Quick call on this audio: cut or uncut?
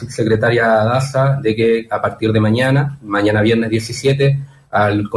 uncut